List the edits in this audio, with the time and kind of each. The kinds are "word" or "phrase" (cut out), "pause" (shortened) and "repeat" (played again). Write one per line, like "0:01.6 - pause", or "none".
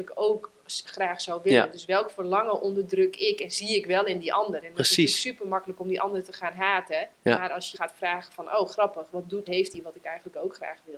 0:07.1 - pause
0:07.7 - word
0:09.4 - phrase

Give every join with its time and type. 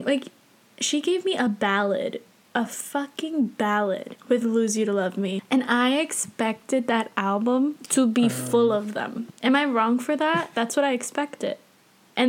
none

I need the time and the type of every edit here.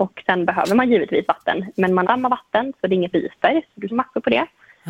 0:02.0 - word
0:03.1 - word
0:03.9 - word

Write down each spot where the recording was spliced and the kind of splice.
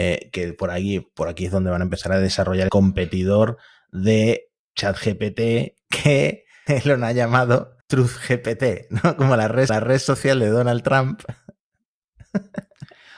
0:02.7 - word
0:06.7 - word
0:07.8 - pause
0:09.7 - repeat

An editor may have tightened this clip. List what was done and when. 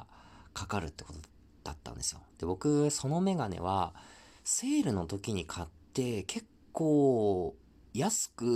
none

